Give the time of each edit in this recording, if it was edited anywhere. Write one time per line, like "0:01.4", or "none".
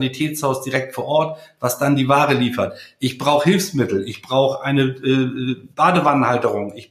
0:05.7